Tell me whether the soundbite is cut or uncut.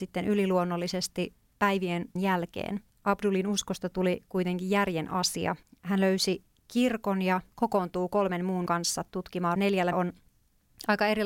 cut